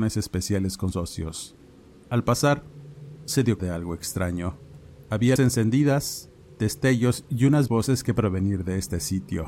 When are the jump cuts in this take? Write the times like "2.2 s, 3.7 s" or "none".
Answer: 0.9 s, 3.6 s, 5.4 s, 7.7 s, 8.2 s